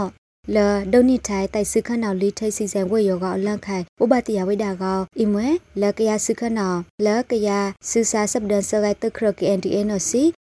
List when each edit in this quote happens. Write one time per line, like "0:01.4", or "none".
0:03.9
0:05.1
0:07.8